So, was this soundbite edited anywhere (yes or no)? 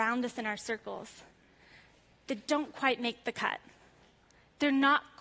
no